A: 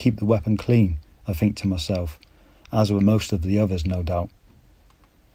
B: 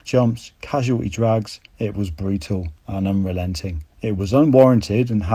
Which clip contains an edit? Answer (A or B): B